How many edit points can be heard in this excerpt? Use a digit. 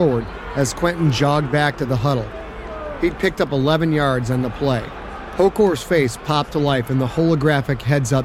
0